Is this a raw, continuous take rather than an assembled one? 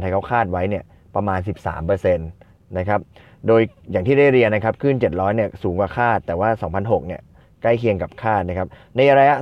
yes; 0 cuts

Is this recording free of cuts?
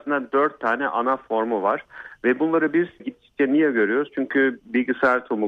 no; 1 cut; at 3.0 s

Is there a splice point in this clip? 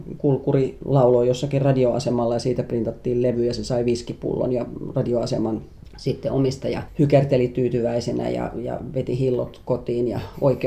no; 0 cuts

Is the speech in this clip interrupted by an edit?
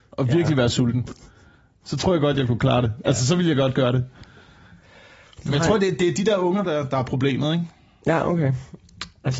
no; 0 cuts

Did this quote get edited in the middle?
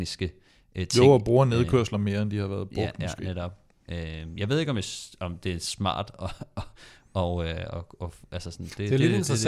no; 0 cuts

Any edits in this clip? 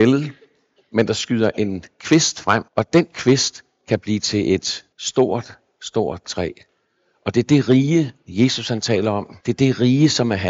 yes; 3 cuts; at 2.7 s, 4.9 s, 9.4 s

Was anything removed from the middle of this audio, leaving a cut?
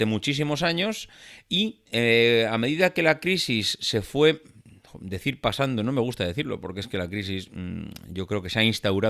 no; 0 cuts

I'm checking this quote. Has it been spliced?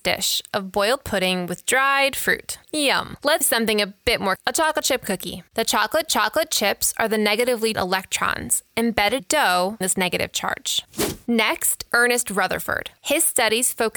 yes; 7 cuts; at 3.4 s, 4.4 s, 6.1 s, 7.7 s, 9.2 s, 9.8 s, 11.9 s

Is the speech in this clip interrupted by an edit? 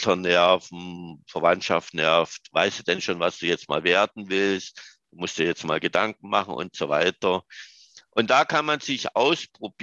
no; 0 cuts

